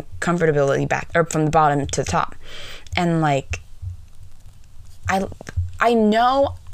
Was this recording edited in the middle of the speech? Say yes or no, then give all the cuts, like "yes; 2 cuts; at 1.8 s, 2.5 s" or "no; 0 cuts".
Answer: yes; 1 cut; at 1.1 s